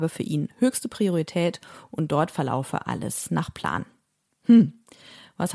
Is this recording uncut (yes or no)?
yes